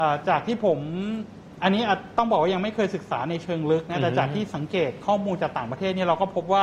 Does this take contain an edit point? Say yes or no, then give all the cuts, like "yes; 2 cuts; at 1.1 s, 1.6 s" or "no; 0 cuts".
no; 0 cuts